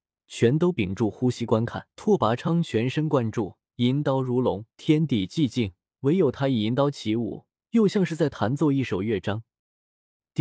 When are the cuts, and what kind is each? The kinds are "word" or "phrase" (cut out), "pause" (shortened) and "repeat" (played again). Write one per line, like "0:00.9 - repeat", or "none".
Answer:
0:01.9 - pause
0:03.7 - pause
0:04.7 - pause
0:05.9 - pause
0:07.5 - pause